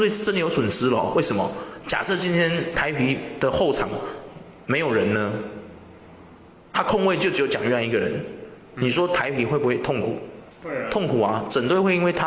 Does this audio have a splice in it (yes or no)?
yes